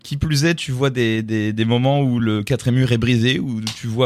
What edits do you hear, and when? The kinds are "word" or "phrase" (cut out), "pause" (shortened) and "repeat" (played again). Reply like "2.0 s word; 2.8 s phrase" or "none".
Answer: none